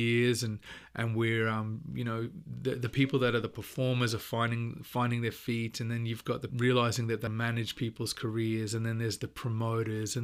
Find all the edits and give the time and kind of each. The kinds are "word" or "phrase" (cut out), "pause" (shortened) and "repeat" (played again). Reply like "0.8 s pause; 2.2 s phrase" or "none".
6.5 s phrase; 7.3 s word